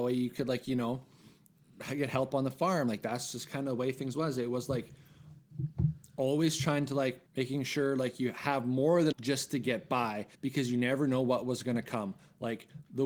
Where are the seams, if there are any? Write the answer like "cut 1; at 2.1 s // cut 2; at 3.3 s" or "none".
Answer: cut 1; at 7.3 s // cut 2; at 9.1 s // cut 3; at 10.3 s